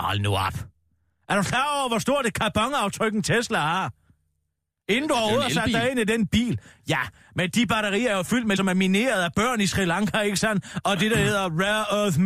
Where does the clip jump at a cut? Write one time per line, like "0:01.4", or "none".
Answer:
0:08.6